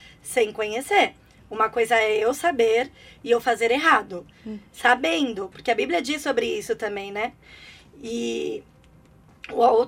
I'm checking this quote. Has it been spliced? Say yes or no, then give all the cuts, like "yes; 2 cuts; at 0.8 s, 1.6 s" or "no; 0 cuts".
no; 0 cuts